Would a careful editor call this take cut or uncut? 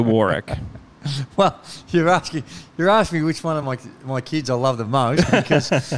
uncut